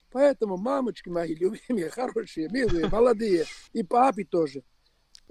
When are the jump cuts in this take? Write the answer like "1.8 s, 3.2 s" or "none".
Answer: 3.7 s